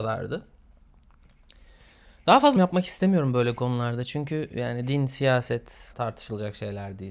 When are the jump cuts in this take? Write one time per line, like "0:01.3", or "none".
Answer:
0:02.6
0:05.9